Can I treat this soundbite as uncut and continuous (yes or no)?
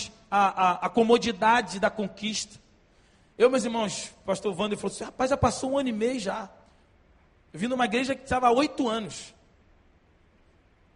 yes